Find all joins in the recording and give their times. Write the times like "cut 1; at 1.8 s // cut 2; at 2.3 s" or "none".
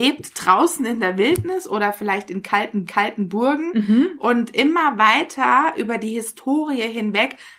cut 1; at 2.9 s